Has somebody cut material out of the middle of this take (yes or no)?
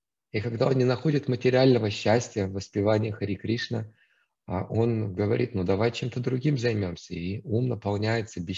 no